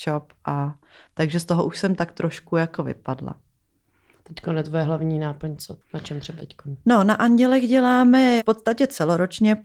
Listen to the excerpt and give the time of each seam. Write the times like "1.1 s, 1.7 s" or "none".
5.8 s, 6.4 s, 8.4 s